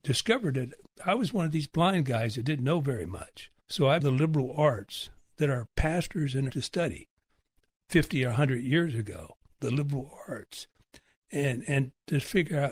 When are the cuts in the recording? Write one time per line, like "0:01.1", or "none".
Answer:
0:03.6
0:04.0
0:06.5